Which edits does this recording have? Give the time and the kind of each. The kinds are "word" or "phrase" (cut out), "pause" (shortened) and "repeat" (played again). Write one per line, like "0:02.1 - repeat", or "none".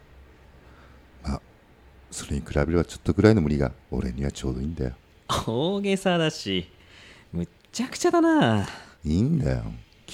0:03.8 - pause